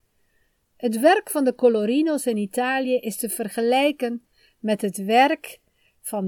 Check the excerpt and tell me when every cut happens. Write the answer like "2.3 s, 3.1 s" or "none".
none